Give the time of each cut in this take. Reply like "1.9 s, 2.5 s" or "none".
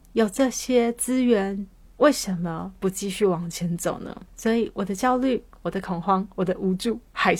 1.8 s, 4.3 s